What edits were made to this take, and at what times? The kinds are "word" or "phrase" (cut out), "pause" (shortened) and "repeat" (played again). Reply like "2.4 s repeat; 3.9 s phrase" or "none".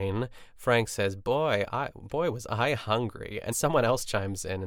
3.5 s word